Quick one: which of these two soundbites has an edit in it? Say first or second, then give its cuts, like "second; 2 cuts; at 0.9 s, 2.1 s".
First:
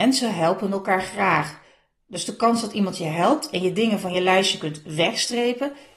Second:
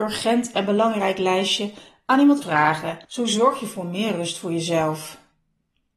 second; 2 cuts; at 2.4 s, 3.0 s